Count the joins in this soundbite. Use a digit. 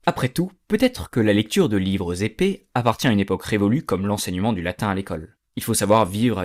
0